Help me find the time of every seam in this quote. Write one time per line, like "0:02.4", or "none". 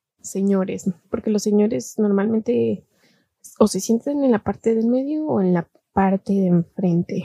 none